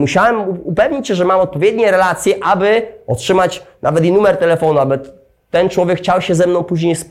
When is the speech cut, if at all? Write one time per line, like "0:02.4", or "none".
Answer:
none